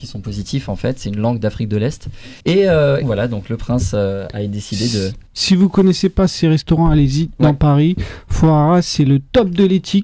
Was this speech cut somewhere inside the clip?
yes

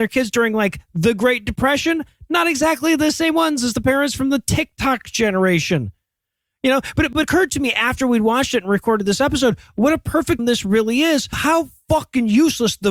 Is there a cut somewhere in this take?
yes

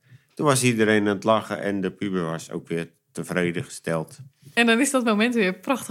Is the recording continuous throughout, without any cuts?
yes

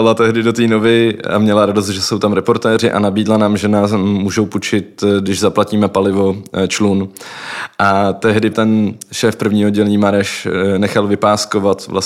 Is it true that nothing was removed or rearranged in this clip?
no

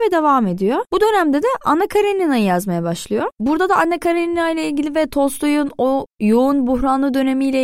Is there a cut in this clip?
no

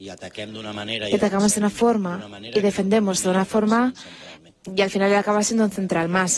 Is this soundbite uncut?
no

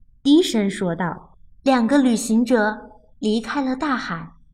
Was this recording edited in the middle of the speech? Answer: no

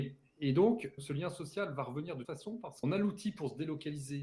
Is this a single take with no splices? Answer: no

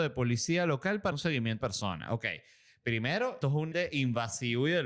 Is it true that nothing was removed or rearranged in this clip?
no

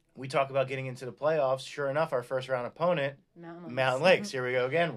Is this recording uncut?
no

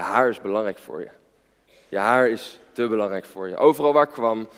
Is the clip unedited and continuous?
yes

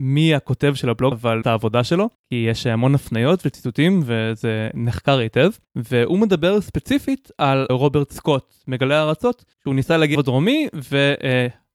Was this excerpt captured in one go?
no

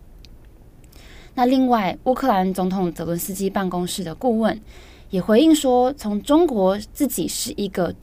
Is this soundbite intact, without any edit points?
yes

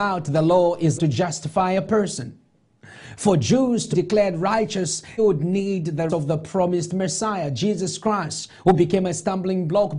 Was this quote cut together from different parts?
yes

